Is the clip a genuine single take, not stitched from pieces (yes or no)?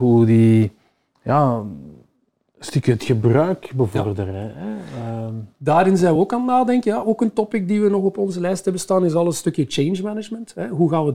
yes